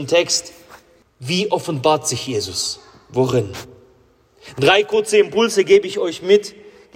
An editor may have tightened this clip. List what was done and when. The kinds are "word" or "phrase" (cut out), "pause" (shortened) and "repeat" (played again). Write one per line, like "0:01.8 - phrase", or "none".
0:01.0 - pause